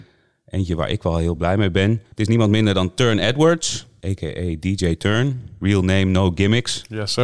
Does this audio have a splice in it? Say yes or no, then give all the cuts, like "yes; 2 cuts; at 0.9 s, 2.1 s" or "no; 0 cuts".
no; 0 cuts